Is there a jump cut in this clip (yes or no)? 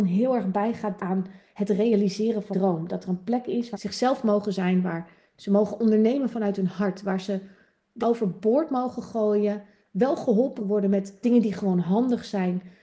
yes